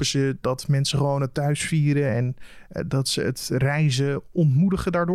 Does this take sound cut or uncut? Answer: uncut